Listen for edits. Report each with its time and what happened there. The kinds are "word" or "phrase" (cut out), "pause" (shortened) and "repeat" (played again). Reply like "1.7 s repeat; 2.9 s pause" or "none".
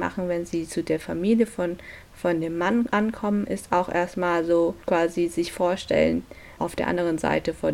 4.8 s pause; 6.6 s word